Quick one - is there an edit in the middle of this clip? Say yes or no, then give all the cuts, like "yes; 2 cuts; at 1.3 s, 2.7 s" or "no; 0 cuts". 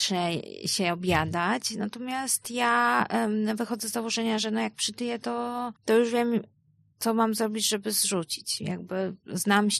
yes; 1 cut; at 5.8 s